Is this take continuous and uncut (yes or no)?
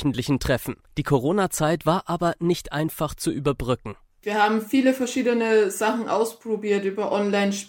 yes